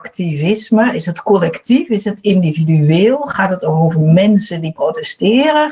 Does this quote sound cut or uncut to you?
uncut